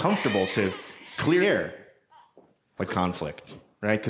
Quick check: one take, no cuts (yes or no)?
no